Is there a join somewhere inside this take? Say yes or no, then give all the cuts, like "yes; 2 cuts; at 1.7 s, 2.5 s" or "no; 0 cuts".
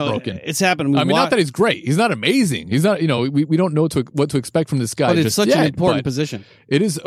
no; 0 cuts